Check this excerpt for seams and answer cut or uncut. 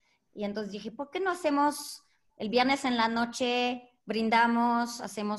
uncut